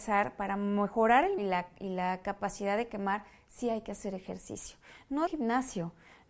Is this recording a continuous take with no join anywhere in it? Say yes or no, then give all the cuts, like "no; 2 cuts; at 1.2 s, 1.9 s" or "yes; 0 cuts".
no; 2 cuts; at 1.4 s, 5.3 s